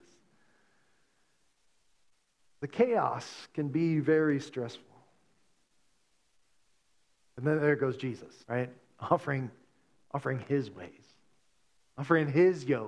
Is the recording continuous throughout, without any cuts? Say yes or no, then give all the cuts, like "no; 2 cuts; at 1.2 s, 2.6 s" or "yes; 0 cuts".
no; 1 cut; at 8.4 s